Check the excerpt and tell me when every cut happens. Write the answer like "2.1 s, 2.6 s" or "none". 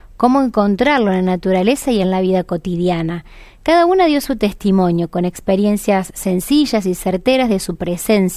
none